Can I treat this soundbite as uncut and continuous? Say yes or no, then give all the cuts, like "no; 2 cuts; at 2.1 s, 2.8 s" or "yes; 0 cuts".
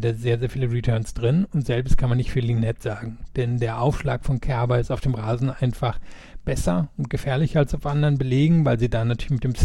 yes; 0 cuts